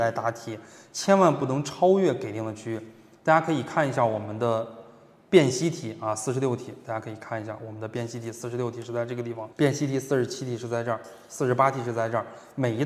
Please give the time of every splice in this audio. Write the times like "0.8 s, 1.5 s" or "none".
9.5 s